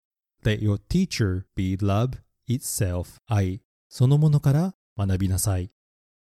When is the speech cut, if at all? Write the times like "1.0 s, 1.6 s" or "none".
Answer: 1.5 s, 3.2 s